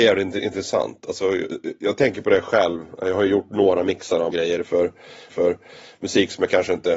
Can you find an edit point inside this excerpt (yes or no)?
yes